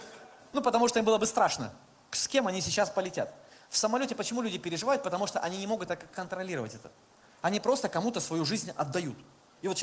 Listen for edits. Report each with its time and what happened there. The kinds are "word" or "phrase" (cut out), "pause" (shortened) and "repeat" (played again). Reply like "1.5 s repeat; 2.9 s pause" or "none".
none

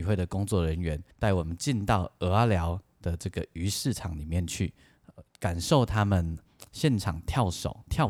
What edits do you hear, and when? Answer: 1.1 s pause; 5.3 s pause

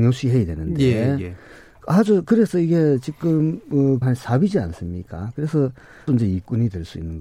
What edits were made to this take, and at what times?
2.2 s word; 4.0 s word; 6.1 s word

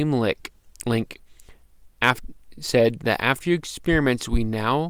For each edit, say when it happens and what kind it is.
3.4 s word

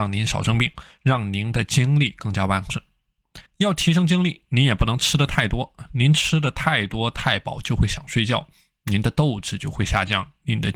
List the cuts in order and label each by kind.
3.5 s pause

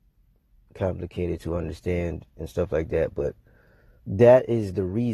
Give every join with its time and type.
4.0 s word

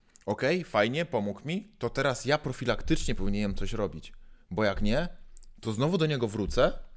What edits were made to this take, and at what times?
none

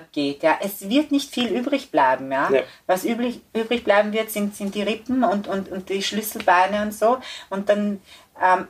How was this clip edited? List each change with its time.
5.6 s word

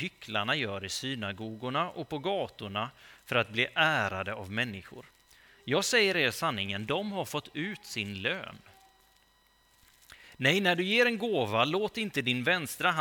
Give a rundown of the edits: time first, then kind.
none

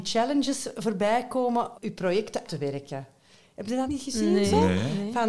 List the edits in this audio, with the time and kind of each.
1.7 s word; 2.5 s word; 3.9 s word

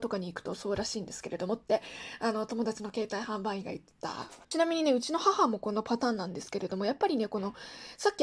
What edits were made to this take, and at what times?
4.4 s pause

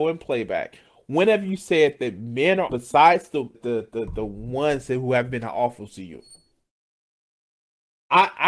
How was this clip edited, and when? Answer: 2.7 s word; 3.5 s word

